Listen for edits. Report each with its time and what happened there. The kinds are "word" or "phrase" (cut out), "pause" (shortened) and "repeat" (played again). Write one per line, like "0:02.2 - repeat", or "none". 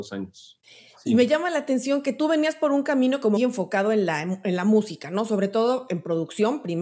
0:03.4 - word